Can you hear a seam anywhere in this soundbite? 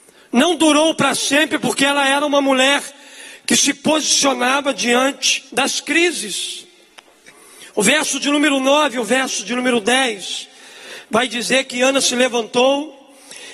yes; 2 cuts; at 5.5 s, 7.7 s

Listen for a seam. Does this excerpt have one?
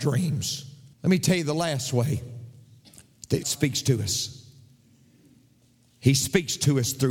yes; 2 cuts; at 0.9 s, 3.4 s

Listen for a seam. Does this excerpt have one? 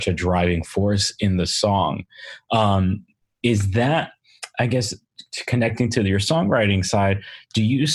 no; 0 cuts

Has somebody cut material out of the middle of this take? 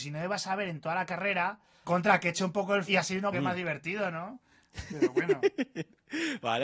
yes; 3 cuts; at 1.8 s, 2.9 s, 3.3 s

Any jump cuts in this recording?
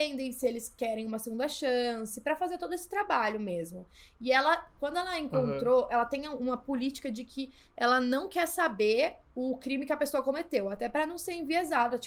no; 0 cuts

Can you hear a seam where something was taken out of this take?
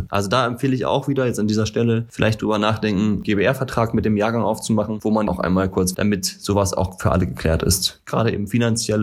yes; 3 cuts; at 3.2 s, 5.3 s, 5.9 s

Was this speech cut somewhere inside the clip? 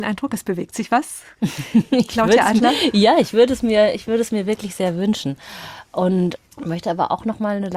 no; 0 cuts

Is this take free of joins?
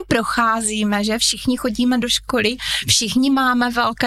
yes; 0 cuts

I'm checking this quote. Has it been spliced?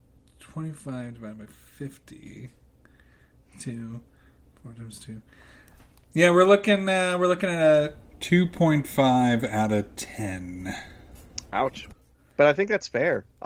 no; 0 cuts

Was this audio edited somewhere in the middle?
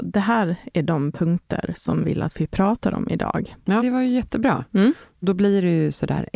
yes; 2 cuts; at 2.0 s, 3.8 s

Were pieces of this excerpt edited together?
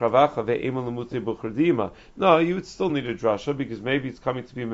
no; 0 cuts

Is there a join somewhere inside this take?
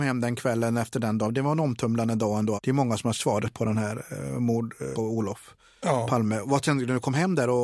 yes; 3 cuts; at 2.6 s, 3.1 s, 4.9 s

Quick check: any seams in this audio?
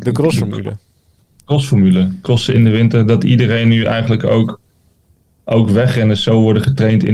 no; 0 cuts

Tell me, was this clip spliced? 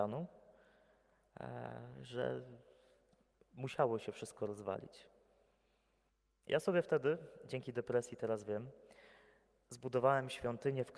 no; 0 cuts

